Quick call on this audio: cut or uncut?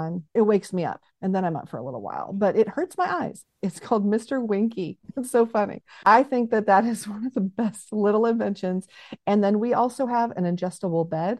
uncut